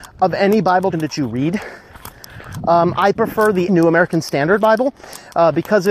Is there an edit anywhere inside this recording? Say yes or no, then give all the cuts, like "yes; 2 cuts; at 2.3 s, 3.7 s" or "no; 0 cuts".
yes; 3 cuts; at 0.9 s, 3.2 s, 3.7 s